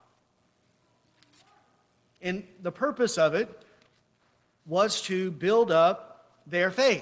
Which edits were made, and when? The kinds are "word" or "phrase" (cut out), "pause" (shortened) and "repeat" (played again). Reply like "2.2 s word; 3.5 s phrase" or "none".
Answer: none